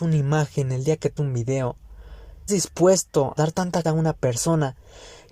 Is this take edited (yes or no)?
yes